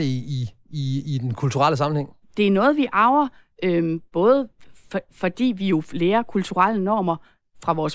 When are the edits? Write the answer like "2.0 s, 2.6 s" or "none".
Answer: none

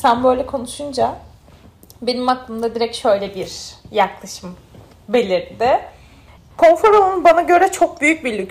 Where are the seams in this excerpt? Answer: none

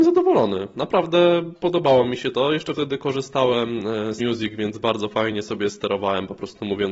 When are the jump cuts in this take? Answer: 4.2 s

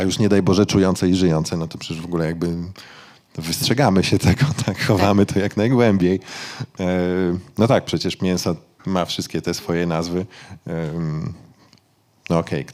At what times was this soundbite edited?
none

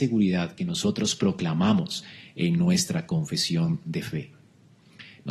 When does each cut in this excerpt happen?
none

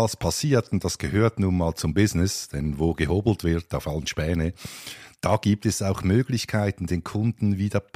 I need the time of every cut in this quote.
none

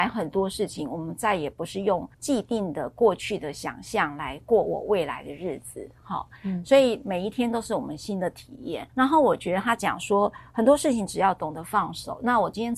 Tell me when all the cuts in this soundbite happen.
2.1 s, 8.9 s

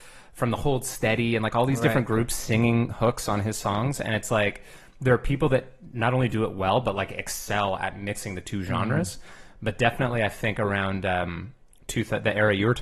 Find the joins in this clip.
none

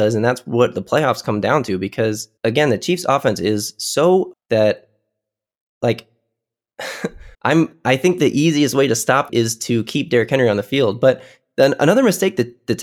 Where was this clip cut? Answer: 2.4 s, 4.3 s, 7.3 s, 9.3 s

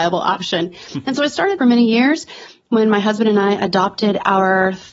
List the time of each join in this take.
1.6 s

